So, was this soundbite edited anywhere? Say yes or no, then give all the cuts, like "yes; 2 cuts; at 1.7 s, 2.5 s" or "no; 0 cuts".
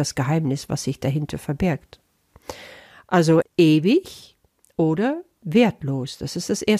yes; 1 cut; at 3.4 s